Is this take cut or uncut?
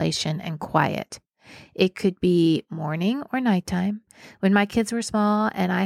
uncut